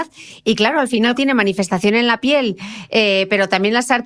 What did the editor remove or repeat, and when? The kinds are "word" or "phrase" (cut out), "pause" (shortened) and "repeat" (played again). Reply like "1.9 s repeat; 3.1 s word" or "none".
1.1 s word